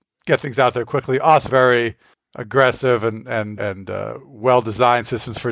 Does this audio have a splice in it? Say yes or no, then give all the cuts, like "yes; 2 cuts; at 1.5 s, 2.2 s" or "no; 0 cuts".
yes; 2 cuts; at 1.5 s, 3.6 s